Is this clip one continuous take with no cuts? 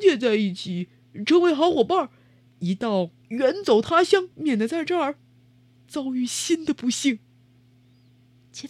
no; 2 cuts; at 3.2 s, 4.3 s

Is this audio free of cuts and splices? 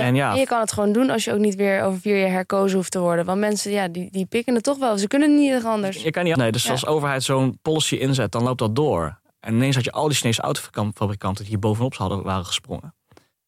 no; 2 cuts; at 4.1 s, 6.4 s

